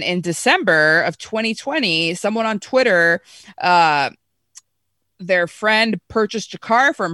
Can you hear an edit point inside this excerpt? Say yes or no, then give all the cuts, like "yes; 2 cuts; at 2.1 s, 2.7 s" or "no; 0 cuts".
no; 0 cuts